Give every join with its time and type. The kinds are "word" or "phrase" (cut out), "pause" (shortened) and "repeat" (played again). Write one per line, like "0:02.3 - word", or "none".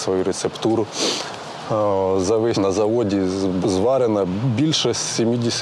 0:02.5 - word
0:03.6 - word

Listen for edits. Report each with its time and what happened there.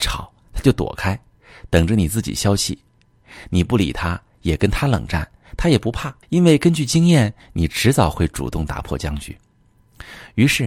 0:06.2 - pause

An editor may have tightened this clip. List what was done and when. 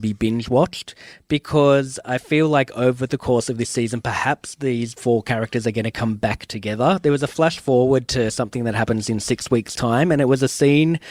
none

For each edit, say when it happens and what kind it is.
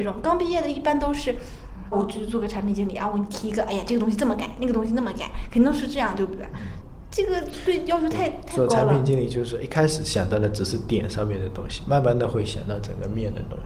0:01.9 - word

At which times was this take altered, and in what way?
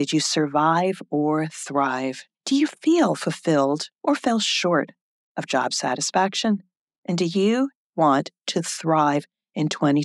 0:02.3 - pause
0:03.9 - pause
0:06.7 - pause

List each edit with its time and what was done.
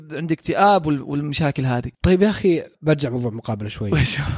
0:01.9 - pause
0:02.7 - pause

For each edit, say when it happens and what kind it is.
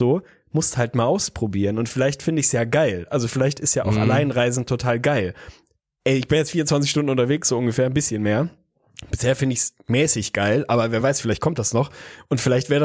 none

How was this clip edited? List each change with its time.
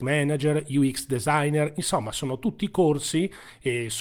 none

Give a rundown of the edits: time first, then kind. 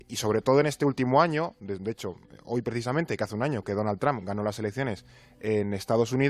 none

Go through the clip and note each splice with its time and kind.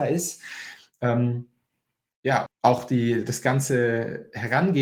0:02.5 - word

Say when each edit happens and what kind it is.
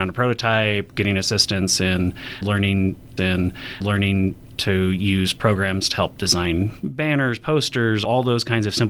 0:03.2 - repeat

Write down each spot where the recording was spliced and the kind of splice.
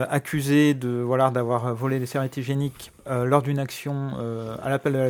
0:03.0 - pause

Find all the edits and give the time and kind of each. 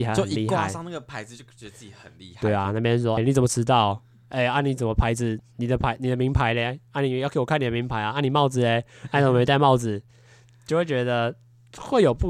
0:03.2 - word

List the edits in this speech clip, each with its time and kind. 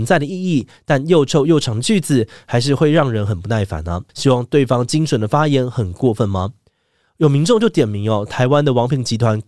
0:04.1 - pause

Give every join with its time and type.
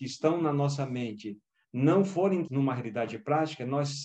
0:02.5 - word

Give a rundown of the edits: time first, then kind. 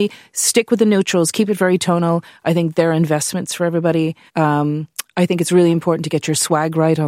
0:04.3 - pause

